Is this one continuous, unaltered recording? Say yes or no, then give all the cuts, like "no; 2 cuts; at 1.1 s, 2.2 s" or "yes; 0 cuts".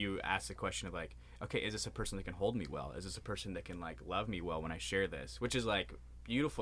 yes; 0 cuts